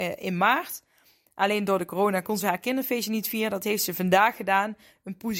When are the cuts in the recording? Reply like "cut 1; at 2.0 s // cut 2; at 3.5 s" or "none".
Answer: none